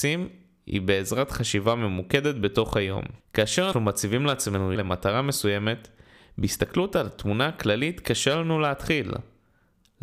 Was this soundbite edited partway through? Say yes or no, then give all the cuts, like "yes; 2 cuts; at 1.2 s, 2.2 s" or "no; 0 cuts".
yes; 2 cuts; at 3.7 s, 4.8 s